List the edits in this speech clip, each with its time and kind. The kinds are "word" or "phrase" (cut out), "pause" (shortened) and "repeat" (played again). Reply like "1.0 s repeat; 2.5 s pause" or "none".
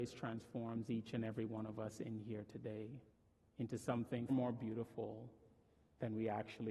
3.1 s pause; 4.3 s word